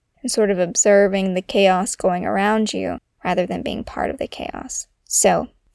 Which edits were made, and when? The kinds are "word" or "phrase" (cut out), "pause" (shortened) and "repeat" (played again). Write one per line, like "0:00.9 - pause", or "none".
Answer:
none

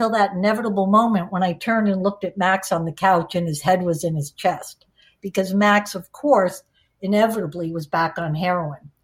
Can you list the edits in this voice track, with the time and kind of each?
none

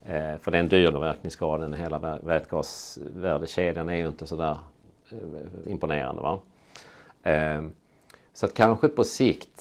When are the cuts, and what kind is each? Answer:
0:00.9 - word
0:05.6 - word

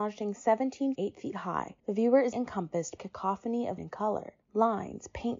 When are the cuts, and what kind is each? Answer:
0:00.9 - phrase
0:01.8 - pause
0:02.3 - word
0:03.0 - phrase
0:03.8 - word
0:04.4 - pause

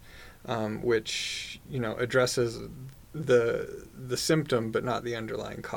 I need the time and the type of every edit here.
0:03.0 - pause

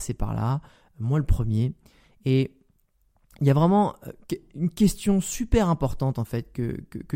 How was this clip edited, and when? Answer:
none

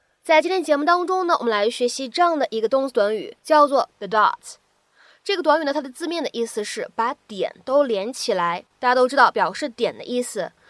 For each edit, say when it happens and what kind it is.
0:03.4 - pause
0:03.9 - word
0:08.7 - word

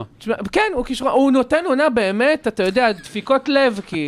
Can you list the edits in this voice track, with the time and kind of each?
none

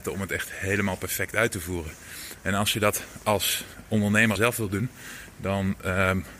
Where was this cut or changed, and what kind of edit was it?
0:04.4 - word

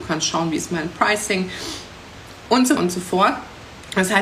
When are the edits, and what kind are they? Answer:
0:02.8 - word

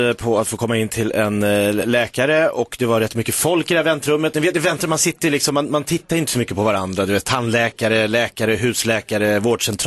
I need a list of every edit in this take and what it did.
none

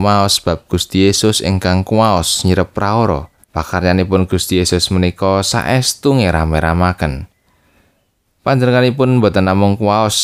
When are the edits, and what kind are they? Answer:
0:03.4 - pause

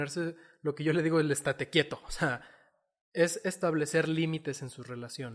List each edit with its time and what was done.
none

